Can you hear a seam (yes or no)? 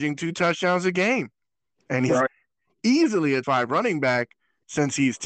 yes